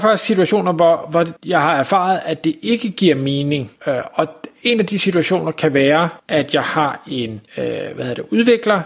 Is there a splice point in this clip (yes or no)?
yes